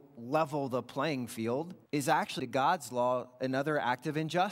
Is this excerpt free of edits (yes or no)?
no